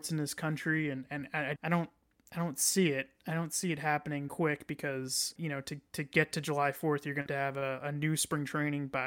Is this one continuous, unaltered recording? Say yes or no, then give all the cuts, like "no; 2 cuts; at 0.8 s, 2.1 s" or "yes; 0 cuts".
no; 4 cuts; at 1.6 s, 4.3 s, 5.4 s, 7.3 s